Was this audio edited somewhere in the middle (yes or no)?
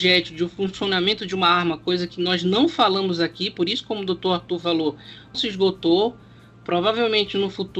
yes